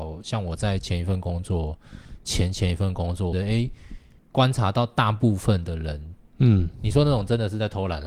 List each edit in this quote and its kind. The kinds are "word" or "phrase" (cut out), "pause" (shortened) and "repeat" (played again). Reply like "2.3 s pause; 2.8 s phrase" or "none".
3.3 s phrase; 4.2 s pause